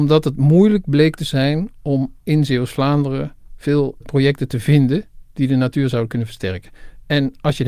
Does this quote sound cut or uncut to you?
cut